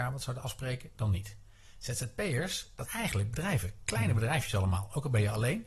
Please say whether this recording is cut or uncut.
cut